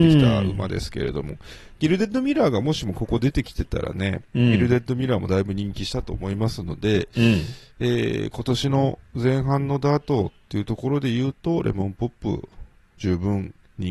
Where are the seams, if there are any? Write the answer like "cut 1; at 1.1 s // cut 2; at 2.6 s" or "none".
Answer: none